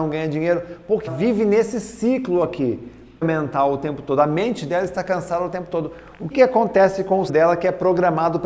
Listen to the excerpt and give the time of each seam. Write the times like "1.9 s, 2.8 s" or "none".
1.1 s, 3.2 s, 6.3 s, 7.3 s